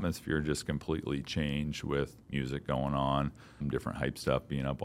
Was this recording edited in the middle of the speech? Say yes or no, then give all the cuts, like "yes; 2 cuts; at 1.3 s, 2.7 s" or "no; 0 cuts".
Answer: yes; 2 cuts; at 2.2 s, 3.6 s